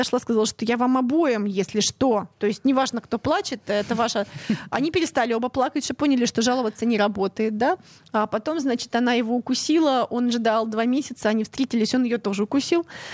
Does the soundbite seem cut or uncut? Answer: uncut